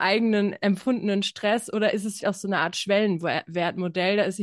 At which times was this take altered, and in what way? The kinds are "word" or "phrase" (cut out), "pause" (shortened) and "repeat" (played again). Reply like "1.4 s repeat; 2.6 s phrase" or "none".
2.2 s word